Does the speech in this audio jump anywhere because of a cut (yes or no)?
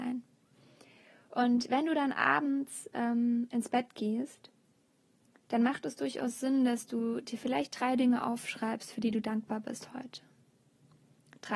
no